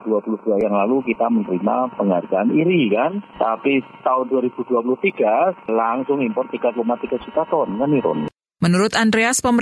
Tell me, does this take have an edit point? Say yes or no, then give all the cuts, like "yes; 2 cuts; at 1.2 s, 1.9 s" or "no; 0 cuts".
no; 0 cuts